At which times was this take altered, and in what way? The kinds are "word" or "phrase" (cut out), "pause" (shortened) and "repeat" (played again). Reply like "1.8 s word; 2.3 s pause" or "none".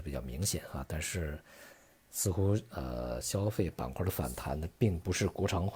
none